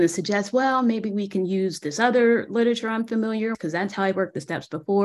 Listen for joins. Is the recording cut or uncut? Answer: cut